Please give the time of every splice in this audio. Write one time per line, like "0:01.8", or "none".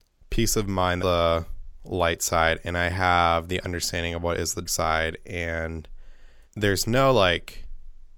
0:01.0
0:04.7
0:06.4

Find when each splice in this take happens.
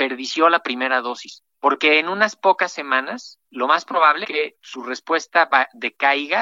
0:01.5
0:03.4
0:04.2
0:04.6

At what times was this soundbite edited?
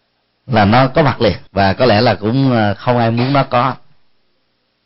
0:01.5

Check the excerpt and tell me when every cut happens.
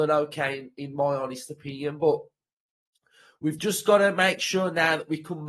none

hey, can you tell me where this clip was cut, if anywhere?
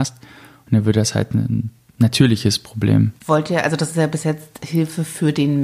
0:03.2

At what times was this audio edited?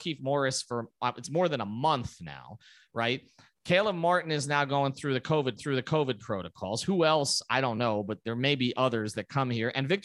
0:05.6

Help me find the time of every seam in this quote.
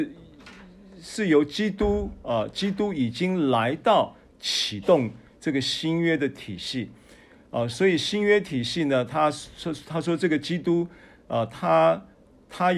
none

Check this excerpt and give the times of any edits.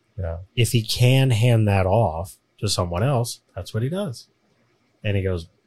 0:03.5

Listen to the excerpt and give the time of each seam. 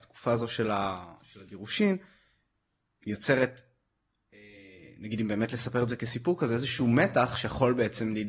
none

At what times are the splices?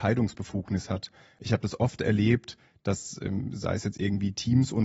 none

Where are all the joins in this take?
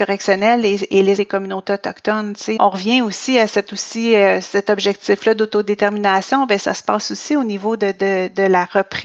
0:01.2
0:02.6

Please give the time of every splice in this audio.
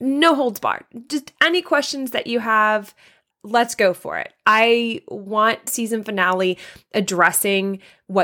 0:03.3
0:05.7

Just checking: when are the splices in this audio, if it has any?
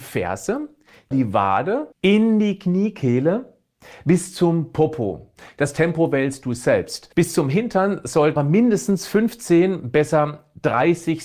0:01.1
0:01.9
0:07.1
0:08.4

